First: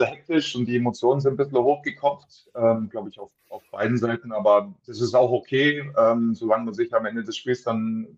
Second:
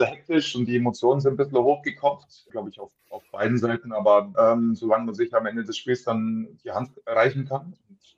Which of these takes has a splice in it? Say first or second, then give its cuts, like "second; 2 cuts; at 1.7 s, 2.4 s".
second; 2 cuts; at 2.5 s, 4.3 s